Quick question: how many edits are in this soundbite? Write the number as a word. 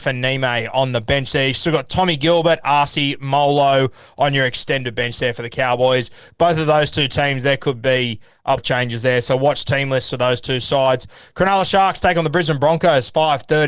one